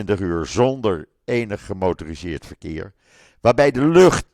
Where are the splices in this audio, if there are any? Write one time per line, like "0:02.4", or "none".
none

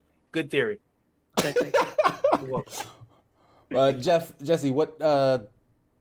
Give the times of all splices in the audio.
none

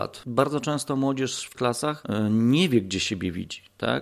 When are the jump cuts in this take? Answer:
0:01.5

